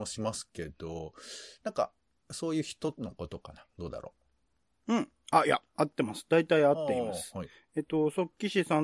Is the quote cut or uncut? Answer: uncut